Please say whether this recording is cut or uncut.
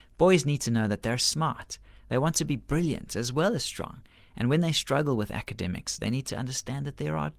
uncut